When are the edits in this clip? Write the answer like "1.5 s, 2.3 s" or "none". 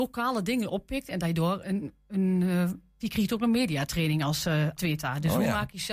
1.6 s, 3.0 s, 4.8 s